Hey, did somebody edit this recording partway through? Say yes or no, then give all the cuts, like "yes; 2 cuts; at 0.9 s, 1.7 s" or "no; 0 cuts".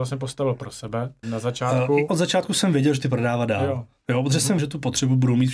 yes; 4 cuts; at 1.2 s, 2.1 s, 3.0 s, 4.6 s